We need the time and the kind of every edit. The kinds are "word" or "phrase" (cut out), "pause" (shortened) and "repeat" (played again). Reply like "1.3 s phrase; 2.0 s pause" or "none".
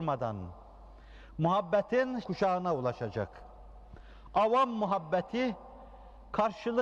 2.2 s word